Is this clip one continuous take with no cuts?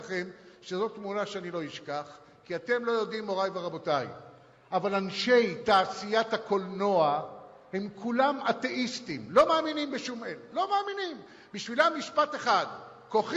yes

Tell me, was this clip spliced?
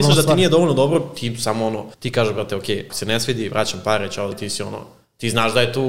yes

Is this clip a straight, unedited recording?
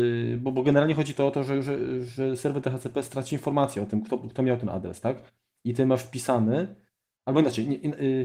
yes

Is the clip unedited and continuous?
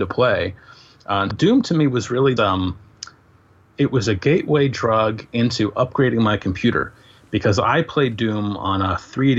no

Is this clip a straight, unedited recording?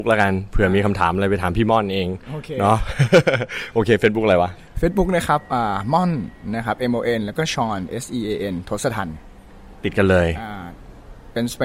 yes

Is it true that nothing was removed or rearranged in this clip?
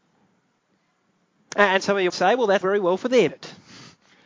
no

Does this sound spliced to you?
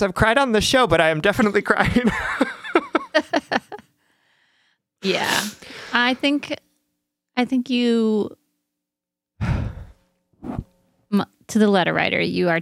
no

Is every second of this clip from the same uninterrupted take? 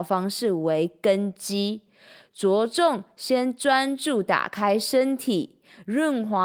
yes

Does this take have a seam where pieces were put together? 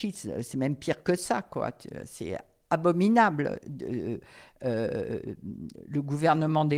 no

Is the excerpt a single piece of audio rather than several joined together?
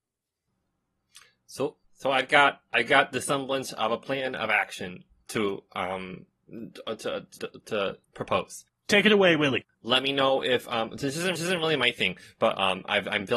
no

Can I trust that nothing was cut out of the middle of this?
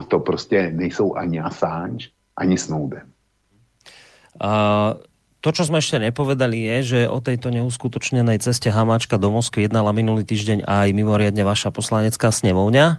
yes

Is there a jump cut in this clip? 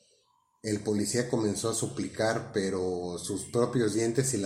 no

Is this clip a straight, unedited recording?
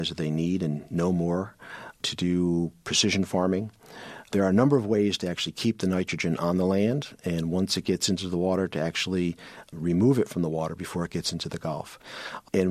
yes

